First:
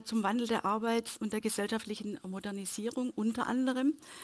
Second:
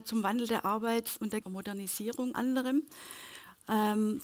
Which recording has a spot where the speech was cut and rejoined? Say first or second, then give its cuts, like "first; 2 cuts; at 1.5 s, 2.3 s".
second; 2 cuts; at 1.4 s, 2.3 s